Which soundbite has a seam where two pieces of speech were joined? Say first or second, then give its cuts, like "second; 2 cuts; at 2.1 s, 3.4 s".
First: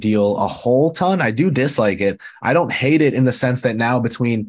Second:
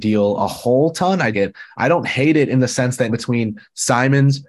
second; 2 cuts; at 1.3 s, 3.1 s